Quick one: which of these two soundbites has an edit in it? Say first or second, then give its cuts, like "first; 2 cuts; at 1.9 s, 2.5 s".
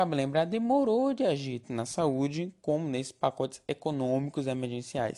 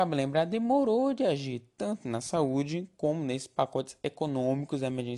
first; 1 cut; at 1.6 s